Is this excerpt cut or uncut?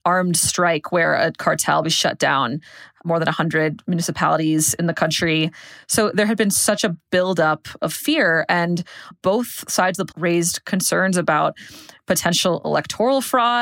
cut